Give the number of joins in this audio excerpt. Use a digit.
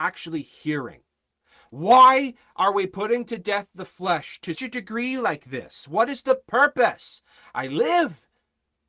1